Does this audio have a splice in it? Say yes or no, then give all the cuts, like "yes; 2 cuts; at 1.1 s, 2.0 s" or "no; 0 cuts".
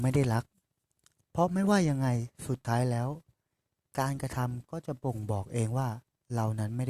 no; 0 cuts